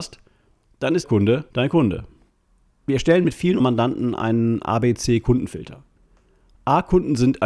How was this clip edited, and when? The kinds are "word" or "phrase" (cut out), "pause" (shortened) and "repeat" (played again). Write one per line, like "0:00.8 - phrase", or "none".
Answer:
0:01.0 - word
0:01.5 - word
0:03.6 - word